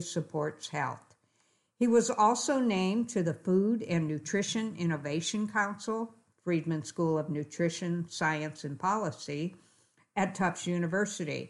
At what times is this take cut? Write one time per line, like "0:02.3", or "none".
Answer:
none

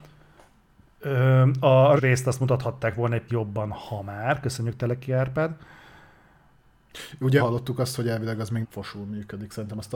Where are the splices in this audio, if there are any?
0:02.0
0:03.3
0:07.4
0:08.6

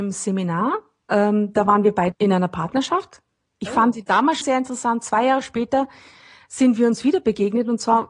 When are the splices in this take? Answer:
0:02.1
0:04.4

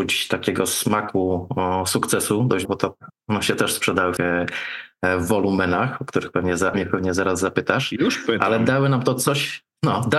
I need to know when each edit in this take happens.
0:02.6
0:03.2
0:04.2
0:06.7

